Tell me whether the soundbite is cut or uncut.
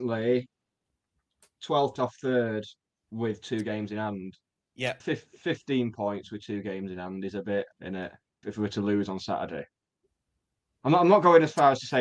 cut